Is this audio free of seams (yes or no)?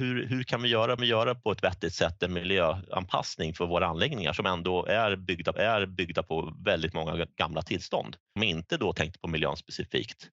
no